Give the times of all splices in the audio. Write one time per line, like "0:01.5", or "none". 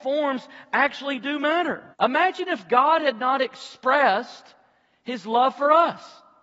0:01.9